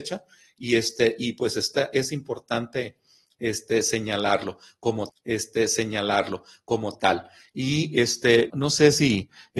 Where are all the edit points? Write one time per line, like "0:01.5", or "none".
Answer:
0:05.1
0:08.5